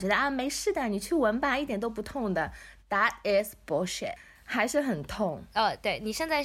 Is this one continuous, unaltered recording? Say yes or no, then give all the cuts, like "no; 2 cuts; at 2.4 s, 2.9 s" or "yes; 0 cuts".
yes; 0 cuts